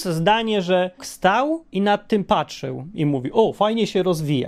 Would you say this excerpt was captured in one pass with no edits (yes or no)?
no